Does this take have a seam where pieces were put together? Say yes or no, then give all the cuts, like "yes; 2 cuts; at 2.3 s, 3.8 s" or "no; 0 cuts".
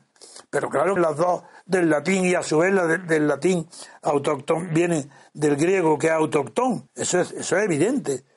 yes; 2 cuts; at 1.0 s, 6.9 s